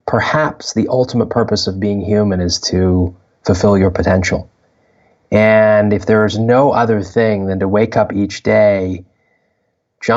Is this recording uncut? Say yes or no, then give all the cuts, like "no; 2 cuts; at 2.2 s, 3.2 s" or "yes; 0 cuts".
yes; 0 cuts